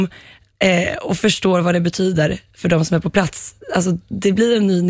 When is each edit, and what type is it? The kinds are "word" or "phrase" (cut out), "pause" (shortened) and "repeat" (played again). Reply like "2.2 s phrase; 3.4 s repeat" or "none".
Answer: none